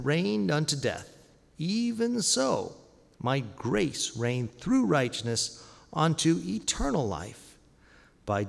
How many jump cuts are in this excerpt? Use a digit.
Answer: 0